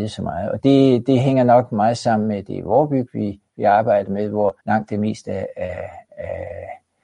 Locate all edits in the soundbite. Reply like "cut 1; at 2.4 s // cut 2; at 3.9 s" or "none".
cut 1; at 4.6 s

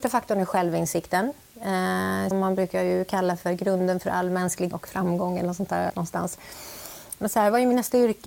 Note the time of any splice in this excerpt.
cut 1; at 2.3 s // cut 2; at 4.7 s // cut 3; at 5.9 s

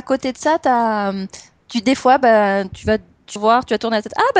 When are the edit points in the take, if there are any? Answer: cut 1; at 3.4 s

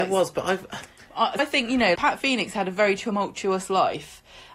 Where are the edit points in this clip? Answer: cut 1; at 1.4 s // cut 2; at 1.9 s

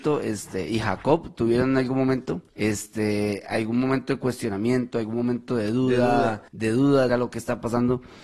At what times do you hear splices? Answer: cut 1; at 2.5 s // cut 2; at 6.5 s // cut 3; at 7.1 s

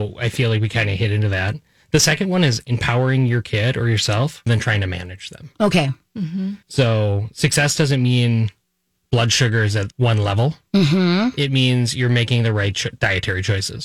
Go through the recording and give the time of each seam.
cut 1; at 4.5 s // cut 2; at 6.6 s // cut 3; at 9.9 s

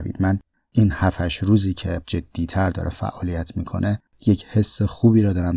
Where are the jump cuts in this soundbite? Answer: cut 1; at 2.0 s

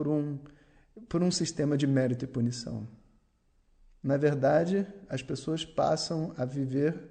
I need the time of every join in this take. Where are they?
none

